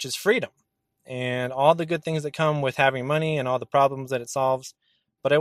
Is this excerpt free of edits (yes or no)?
yes